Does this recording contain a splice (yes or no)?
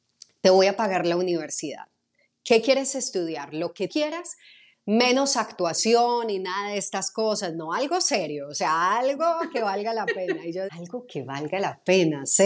yes